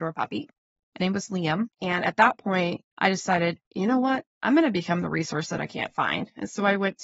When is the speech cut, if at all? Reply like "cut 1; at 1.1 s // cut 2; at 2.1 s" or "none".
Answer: cut 1; at 1.0 s // cut 2; at 1.7 s // cut 3; at 2.9 s // cut 4; at 3.6 s